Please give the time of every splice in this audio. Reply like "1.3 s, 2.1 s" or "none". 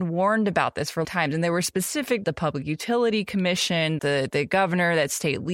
1.0 s, 2.2 s, 4.0 s, 4.3 s